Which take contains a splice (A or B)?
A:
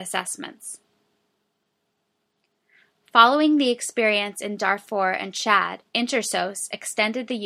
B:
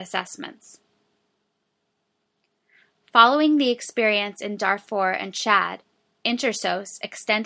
A